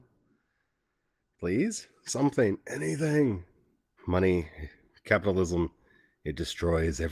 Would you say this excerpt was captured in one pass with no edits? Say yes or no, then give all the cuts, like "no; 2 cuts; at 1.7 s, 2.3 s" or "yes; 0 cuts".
no; 1 cut; at 4.0 s